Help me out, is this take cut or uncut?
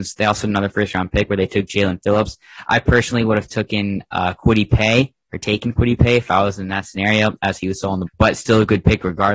cut